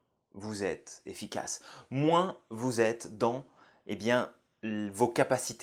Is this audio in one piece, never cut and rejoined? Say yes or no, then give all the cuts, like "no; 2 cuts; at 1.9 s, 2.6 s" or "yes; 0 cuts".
yes; 0 cuts